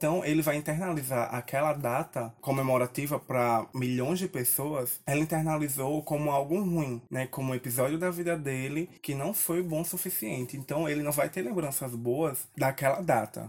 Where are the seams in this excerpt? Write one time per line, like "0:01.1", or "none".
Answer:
0:09.0